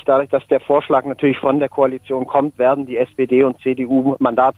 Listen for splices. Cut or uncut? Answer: uncut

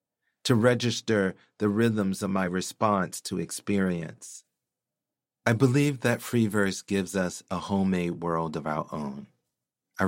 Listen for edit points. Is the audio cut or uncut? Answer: uncut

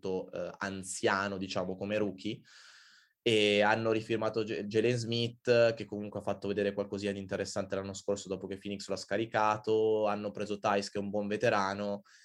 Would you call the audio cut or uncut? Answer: uncut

